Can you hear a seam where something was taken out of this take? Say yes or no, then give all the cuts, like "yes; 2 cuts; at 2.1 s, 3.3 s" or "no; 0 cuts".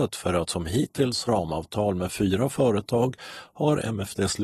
yes; 1 cut; at 1.3 s